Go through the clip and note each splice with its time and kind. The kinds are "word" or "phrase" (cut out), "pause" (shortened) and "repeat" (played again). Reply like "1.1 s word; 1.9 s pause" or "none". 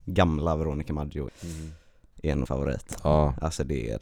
1.3 s word; 2.5 s word